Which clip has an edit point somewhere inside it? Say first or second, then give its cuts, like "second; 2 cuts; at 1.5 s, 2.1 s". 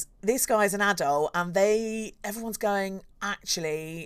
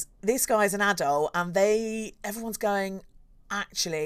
first; 1 cut; at 3.1 s